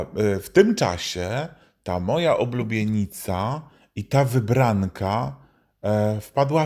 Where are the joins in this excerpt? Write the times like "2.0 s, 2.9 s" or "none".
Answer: none